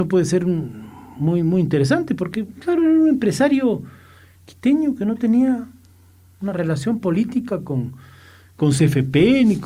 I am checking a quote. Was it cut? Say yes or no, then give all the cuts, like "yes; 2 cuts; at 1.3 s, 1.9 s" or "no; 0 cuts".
no; 0 cuts